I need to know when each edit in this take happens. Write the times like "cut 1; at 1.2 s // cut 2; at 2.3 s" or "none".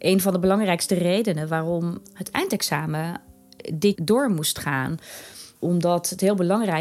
cut 1; at 3.9 s // cut 2; at 5.5 s